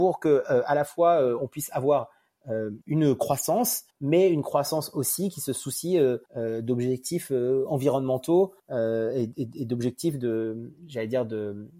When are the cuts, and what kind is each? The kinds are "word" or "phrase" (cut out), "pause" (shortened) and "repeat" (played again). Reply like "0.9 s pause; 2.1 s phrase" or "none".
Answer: 2.8 s pause; 3.9 s pause; 6.3 s pause; 8.6 s pause

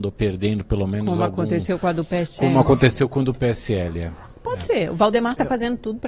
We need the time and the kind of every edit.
none

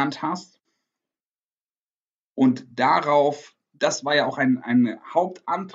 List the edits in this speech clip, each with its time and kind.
none

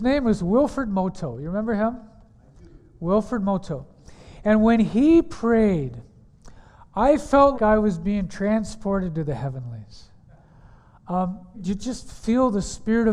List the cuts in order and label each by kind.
7.5 s word; 11.5 s word

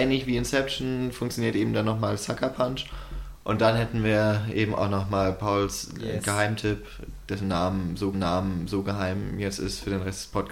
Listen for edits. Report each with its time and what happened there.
8.1 s repeat

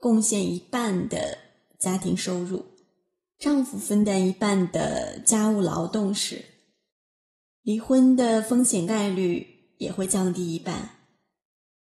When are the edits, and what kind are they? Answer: none

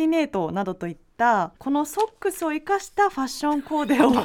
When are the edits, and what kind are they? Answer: 1.6 s pause

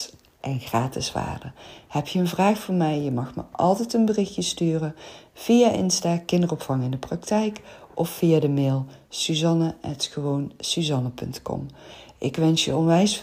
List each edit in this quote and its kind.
none

